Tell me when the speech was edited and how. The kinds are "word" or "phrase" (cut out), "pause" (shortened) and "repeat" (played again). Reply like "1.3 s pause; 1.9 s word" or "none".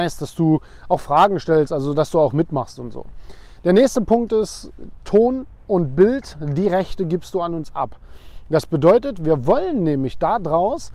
none

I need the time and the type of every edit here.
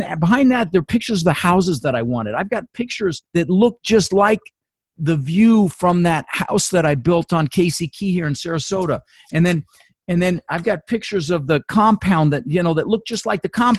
3.3 s pause

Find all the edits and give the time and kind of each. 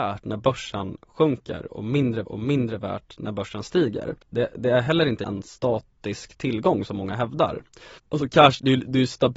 2.2 s repeat; 4.2 s pause; 5.2 s word; 8.0 s pause

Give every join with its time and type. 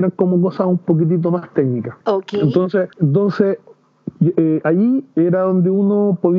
2.0 s pause; 2.9 s pause

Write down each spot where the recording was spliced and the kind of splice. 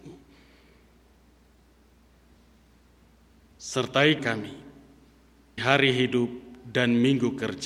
4.2 s word; 5.6 s word

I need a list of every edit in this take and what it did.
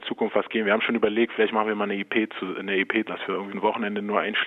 3.1 s phrase; 3.5 s word

